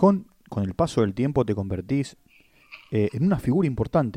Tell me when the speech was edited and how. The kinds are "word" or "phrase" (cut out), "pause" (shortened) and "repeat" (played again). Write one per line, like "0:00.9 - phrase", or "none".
none